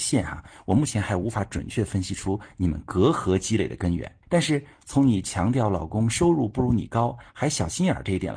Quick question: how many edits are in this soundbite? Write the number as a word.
one